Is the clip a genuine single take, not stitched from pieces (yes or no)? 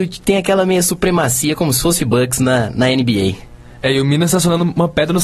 no